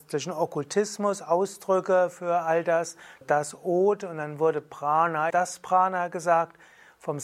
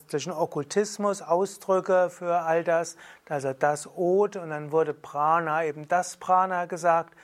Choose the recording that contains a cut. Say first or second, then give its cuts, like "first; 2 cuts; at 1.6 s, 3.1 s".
first; 2 cuts; at 3.2 s, 5.3 s